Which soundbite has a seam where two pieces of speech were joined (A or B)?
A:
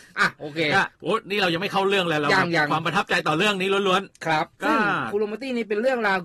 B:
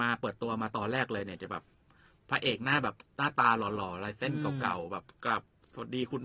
A